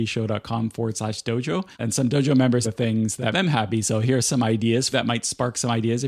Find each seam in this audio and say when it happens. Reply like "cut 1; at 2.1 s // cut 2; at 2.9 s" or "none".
cut 1; at 1.7 s // cut 2; at 2.6 s // cut 3; at 3.3 s // cut 4; at 4.9 s